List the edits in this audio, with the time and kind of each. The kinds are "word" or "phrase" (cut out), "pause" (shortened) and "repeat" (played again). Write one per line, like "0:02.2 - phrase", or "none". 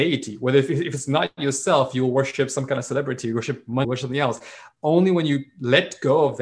0:03.8 - word